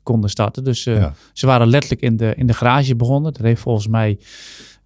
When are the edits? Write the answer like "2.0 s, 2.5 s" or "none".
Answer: none